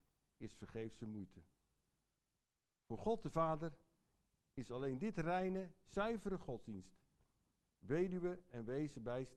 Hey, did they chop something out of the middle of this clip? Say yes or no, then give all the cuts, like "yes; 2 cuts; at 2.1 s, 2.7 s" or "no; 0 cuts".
no; 0 cuts